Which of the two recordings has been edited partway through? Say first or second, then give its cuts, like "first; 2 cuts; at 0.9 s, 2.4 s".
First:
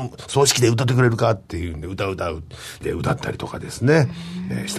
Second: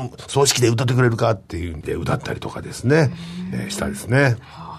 second; 1 cut; at 1.8 s